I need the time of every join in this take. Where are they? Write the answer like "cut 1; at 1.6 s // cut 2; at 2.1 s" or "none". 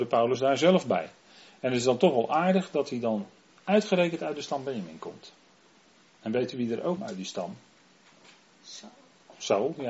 cut 1; at 7.0 s